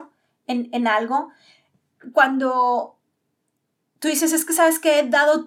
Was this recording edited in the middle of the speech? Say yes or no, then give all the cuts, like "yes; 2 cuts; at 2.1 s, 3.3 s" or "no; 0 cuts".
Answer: no; 0 cuts